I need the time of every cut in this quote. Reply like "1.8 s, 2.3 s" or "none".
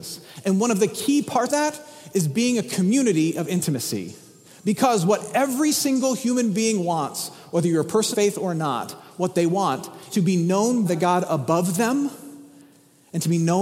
1.5 s, 8.1 s, 10.1 s, 10.9 s